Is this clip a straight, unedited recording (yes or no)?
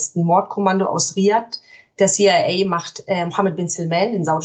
yes